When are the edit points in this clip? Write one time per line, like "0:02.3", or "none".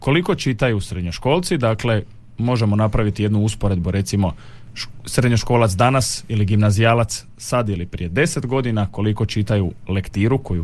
none